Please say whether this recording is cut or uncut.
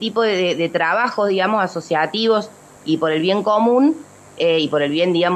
uncut